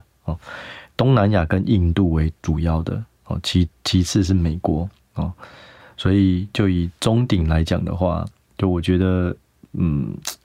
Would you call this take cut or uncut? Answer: uncut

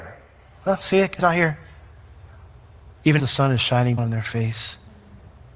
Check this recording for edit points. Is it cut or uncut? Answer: cut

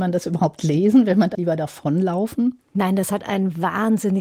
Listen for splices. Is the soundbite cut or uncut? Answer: cut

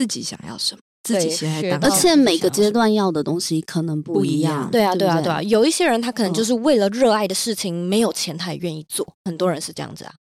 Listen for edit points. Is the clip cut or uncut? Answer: cut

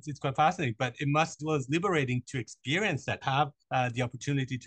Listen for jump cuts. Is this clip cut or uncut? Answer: cut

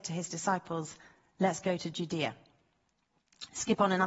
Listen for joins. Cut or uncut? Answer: uncut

